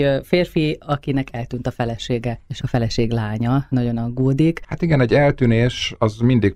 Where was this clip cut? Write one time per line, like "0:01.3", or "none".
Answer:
none